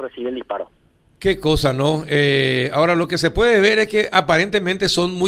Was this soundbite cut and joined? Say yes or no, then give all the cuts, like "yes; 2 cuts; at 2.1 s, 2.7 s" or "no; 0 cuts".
no; 0 cuts